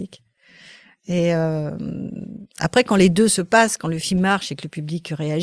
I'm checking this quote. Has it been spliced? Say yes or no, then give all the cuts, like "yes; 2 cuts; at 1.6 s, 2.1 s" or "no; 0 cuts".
no; 0 cuts